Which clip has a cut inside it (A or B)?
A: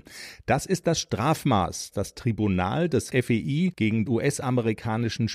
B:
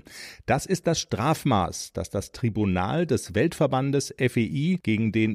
A